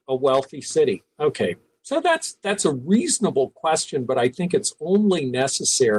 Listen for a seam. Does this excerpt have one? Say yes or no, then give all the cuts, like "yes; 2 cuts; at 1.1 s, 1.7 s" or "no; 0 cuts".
no; 0 cuts